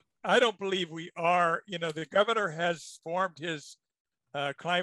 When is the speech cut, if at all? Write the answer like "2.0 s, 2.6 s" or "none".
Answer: none